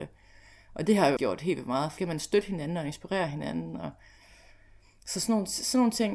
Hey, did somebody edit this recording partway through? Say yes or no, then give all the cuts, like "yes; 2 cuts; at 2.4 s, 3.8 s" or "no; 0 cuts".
yes; 2 cuts; at 1.2 s, 2.0 s